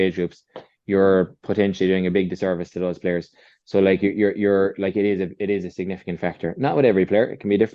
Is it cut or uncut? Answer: uncut